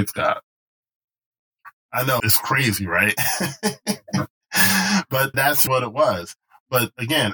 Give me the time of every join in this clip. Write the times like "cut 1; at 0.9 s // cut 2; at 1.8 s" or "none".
cut 1; at 2.2 s // cut 2; at 5.3 s // cut 3; at 5.7 s